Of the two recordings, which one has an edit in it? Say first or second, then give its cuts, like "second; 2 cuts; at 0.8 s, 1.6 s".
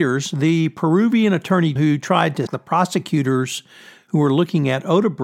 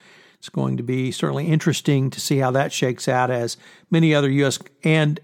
first; 2 cuts; at 1.8 s, 2.5 s